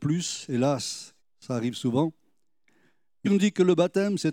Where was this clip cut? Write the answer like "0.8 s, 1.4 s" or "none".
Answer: 1.2 s, 3.2 s